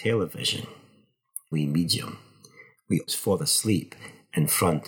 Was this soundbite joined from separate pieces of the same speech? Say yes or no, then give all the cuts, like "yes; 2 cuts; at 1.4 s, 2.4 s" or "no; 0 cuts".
yes; 2 cuts; at 1.5 s, 3.1 s